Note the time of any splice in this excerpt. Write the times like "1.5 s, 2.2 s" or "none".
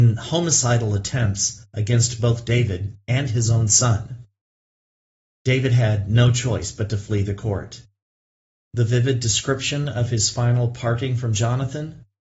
none